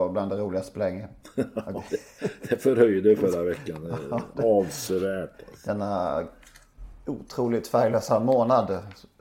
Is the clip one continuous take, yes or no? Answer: yes